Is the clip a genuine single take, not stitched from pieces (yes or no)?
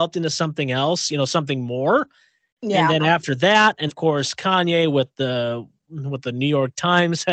no